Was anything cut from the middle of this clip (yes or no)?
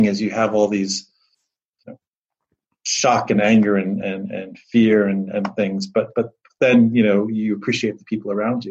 no